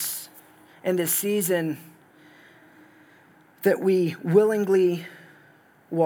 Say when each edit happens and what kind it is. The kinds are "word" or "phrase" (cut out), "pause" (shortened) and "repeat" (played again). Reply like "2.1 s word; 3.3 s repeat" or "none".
none